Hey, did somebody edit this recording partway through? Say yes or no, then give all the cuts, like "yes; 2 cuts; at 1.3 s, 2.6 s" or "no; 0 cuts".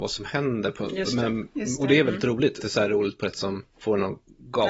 yes; 3 cuts; at 2.6 s, 3.3 s, 3.7 s